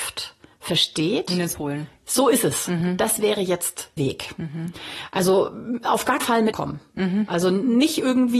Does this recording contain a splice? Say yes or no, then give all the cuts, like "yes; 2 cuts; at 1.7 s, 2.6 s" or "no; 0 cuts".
yes; 4 cuts; at 1.5 s, 4.0 s, 6.2 s, 6.5 s